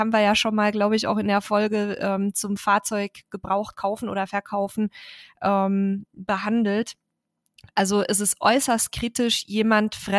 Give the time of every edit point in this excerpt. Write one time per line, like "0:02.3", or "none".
none

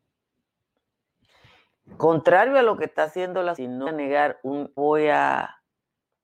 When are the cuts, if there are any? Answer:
0:03.6
0:03.9
0:04.8

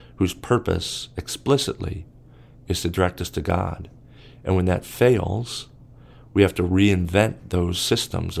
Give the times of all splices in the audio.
none

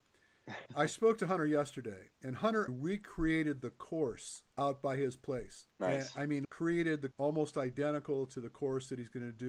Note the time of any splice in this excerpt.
0:02.1
0:02.7
0:04.5
0:05.7
0:06.4
0:07.1

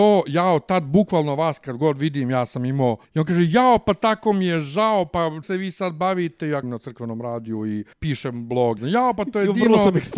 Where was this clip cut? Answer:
0:03.0
0:05.4
0:06.6
0:07.9
0:08.8

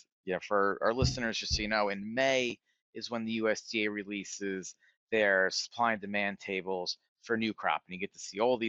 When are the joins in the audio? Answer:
none

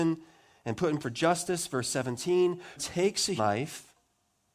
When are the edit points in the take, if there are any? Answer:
0:01.0
0:02.8
0:03.4

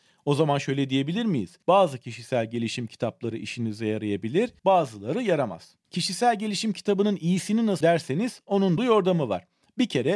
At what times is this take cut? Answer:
0:01.6
0:04.6
0:05.8
0:07.8
0:08.8

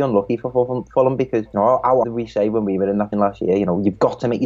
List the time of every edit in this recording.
0:01.5
0:02.0
0:03.1

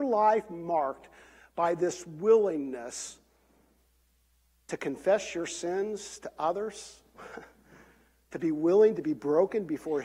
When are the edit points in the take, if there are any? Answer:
none

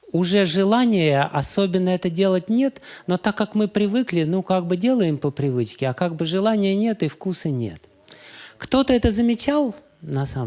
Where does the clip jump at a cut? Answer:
none

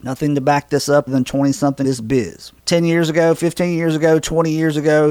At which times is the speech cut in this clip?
0:01.1
0:01.8
0:02.6

